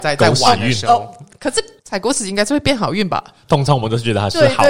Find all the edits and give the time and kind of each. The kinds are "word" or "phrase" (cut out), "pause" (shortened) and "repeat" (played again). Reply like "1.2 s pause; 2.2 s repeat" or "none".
1.8 s pause